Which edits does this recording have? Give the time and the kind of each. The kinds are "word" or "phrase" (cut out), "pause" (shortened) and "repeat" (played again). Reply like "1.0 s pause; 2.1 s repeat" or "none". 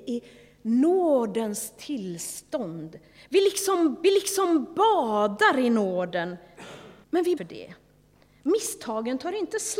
4.0 s repeat; 7.0 s pause; 7.4 s phrase